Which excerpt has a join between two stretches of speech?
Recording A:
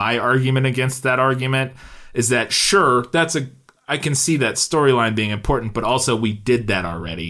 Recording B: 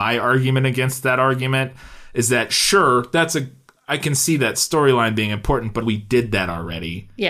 B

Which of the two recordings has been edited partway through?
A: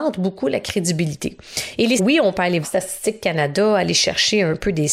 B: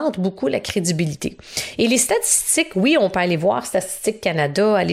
A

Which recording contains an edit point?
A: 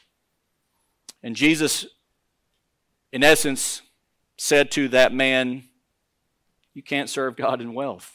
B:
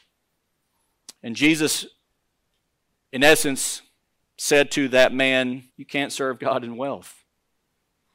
B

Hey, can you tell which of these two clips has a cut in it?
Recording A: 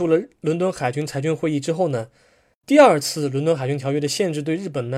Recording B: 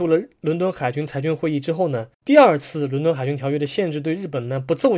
B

